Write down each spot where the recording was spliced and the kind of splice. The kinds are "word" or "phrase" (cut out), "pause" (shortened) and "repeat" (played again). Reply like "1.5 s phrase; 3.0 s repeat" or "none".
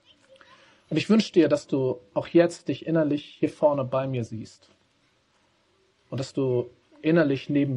none